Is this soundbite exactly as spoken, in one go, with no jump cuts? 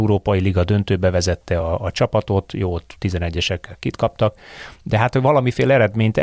yes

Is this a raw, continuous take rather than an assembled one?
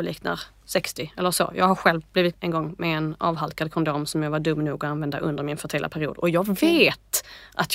no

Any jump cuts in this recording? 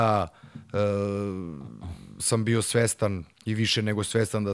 yes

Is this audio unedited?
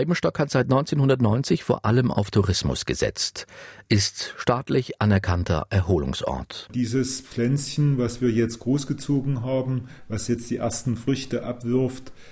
yes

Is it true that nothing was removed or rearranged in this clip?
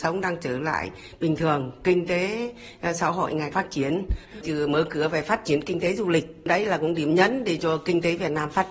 no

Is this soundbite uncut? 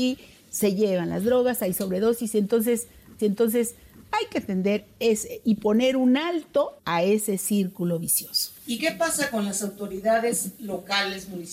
no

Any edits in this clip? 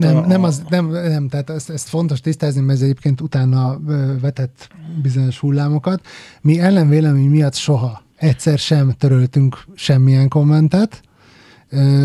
yes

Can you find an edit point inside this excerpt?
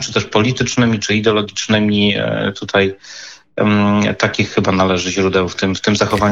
no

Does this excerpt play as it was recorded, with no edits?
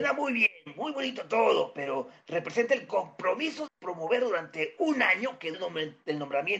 no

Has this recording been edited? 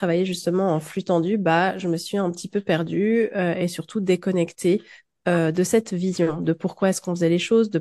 no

